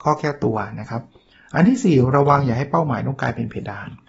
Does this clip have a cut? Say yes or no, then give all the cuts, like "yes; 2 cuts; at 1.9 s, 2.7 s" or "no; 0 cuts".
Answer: no; 0 cuts